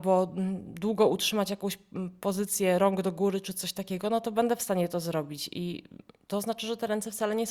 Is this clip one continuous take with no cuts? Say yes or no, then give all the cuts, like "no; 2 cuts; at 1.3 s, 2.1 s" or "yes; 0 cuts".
yes; 0 cuts